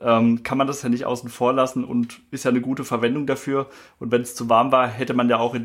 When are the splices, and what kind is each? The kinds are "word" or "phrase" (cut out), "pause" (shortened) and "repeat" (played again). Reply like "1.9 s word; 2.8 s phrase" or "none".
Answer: none